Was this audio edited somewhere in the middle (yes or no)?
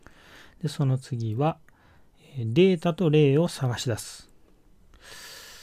no